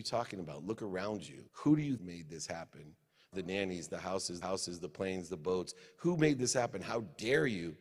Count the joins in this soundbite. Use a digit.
4